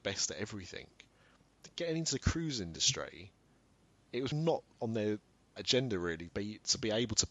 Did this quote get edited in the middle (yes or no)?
yes